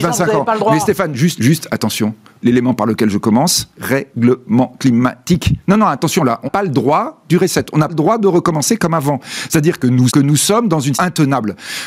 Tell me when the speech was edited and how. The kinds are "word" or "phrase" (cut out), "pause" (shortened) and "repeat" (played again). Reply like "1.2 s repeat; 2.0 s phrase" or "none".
1.4 s word; 2.4 s word; 3.8 s word; 6.5 s word; 7.9 s word; 10.1 s word; 10.9 s word